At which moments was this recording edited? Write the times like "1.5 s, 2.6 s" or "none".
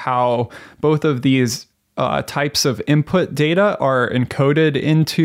1.7 s